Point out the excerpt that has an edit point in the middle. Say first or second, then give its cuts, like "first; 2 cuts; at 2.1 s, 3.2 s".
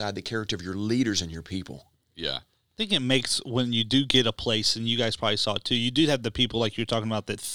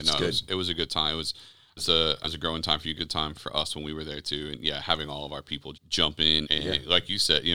second; 6 cuts; at 1.8 s, 2.2 s, 3.0 s, 3.3 s, 5.7 s, 6.4 s